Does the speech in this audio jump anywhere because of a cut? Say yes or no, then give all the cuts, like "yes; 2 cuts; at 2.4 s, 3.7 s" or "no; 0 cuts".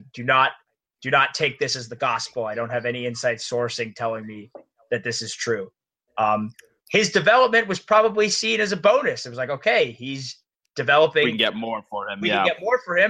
no; 0 cuts